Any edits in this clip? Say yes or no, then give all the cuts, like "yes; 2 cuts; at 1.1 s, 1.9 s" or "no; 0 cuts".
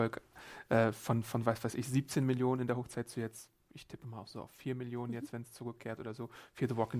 no; 0 cuts